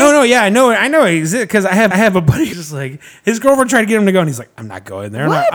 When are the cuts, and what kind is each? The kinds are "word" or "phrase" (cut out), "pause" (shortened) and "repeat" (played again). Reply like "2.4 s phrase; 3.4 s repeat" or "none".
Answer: 1.9 s repeat; 2.5 s word